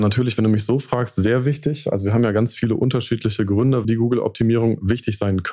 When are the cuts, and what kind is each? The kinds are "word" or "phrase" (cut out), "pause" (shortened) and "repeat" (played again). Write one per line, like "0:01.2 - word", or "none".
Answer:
0:03.8 - word